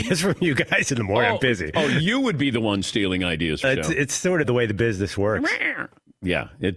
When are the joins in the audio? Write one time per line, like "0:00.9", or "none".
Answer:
0:03.6
0:04.4